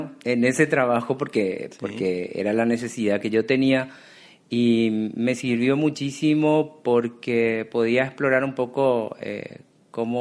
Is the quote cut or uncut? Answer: uncut